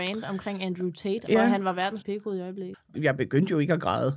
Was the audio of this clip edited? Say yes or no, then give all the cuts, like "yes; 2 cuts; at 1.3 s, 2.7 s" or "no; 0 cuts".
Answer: yes; 3 cuts; at 1.3 s, 2.0 s, 2.7 s